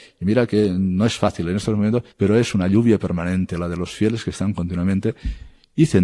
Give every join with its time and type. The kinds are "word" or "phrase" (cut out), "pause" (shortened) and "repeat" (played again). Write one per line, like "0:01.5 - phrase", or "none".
0:02.1 - pause